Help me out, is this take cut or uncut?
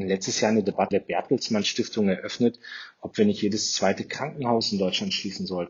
cut